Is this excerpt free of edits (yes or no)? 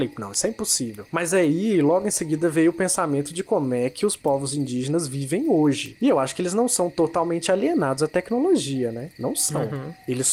yes